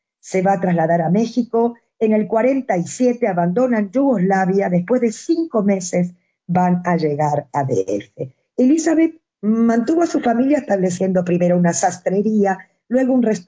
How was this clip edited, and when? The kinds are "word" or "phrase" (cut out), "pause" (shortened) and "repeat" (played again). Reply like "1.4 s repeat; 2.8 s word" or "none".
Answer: none